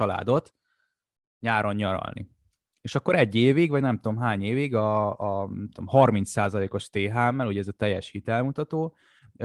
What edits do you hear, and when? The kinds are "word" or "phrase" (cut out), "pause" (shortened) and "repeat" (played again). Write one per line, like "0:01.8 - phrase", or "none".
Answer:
none